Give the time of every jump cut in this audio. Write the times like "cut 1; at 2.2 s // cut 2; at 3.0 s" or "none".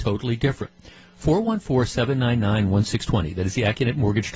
none